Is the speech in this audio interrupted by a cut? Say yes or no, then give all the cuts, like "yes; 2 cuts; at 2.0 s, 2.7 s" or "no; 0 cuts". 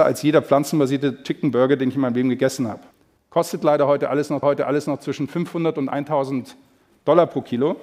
yes; 1 cut; at 4.4 s